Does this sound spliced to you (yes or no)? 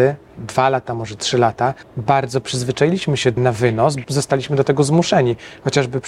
yes